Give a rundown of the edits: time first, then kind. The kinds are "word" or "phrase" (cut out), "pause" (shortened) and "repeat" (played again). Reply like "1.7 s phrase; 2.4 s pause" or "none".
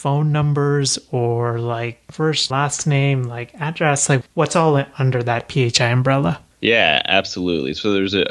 2.5 s word; 6.5 s pause